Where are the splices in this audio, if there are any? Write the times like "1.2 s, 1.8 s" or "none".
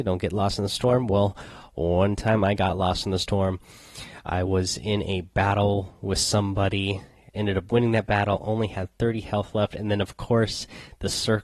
none